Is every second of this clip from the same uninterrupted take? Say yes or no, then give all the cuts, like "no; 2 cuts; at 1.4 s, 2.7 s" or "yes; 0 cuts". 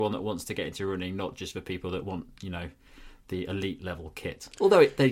yes; 0 cuts